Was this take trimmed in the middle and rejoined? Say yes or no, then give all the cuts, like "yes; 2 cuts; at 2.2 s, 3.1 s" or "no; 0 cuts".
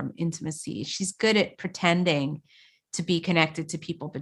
no; 0 cuts